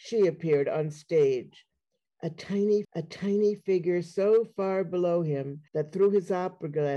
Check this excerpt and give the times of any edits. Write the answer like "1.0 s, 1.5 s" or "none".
2.8 s, 5.7 s